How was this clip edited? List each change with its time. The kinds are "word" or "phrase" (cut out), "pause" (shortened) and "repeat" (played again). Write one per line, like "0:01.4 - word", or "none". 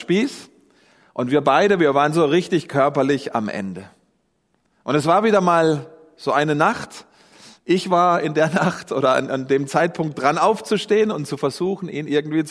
none